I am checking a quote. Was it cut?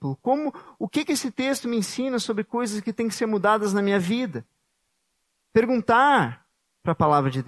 no; 0 cuts

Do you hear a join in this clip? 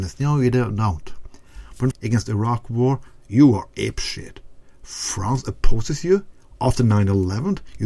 yes; 1 cut; at 1.9 s

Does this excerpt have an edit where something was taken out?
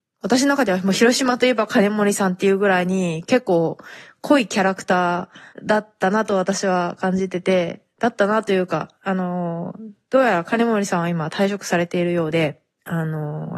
yes; 1 cut; at 5.5 s

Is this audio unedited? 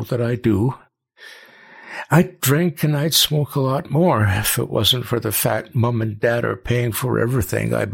yes; 0 cuts

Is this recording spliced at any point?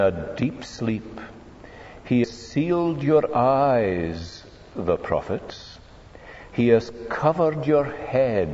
yes; 1 cut; at 2.2 s

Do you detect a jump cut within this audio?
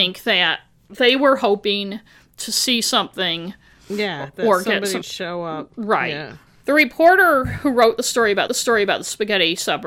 yes; 2 cuts; at 5.0 s, 8.5 s

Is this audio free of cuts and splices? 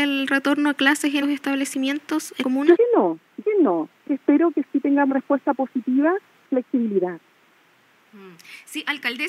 no; 7 cuts; at 1.2 s, 2.4 s, 2.8 s, 3.4 s, 4.1 s, 5.1 s, 6.5 s

